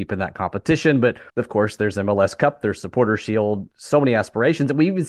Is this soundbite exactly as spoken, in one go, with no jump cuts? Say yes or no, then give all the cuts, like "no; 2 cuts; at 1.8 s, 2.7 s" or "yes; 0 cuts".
no; 1 cut; at 1.3 s